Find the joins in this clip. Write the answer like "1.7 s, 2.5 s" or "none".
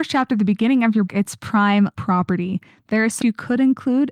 1.1 s, 1.9 s, 3.2 s